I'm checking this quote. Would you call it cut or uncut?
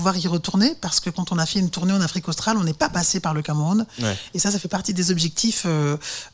uncut